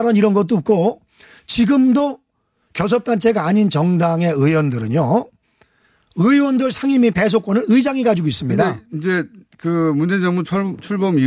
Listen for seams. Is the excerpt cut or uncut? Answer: uncut